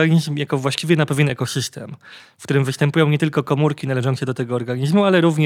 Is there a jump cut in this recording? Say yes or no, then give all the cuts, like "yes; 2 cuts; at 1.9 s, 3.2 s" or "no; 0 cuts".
no; 0 cuts